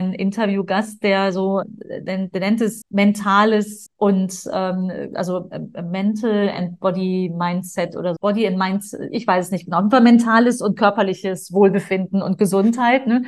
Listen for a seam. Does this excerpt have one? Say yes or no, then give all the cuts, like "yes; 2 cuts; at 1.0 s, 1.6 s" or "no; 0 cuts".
yes; 4 cuts; at 1.6 s, 2.8 s, 3.9 s, 8.2 s